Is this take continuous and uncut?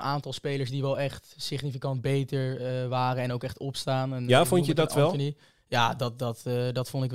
yes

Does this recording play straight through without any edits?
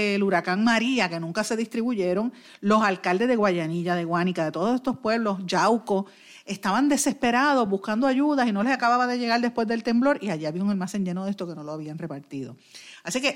yes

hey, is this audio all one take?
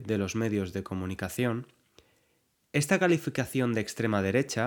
yes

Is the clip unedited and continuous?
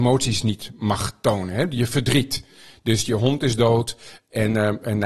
yes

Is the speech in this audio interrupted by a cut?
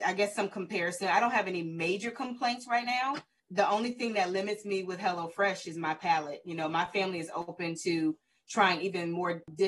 no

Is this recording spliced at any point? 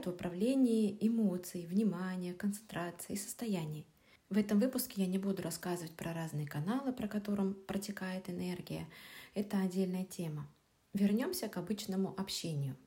no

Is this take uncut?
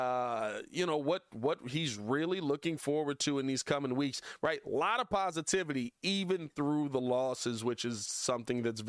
yes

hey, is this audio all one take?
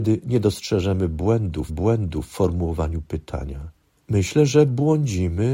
no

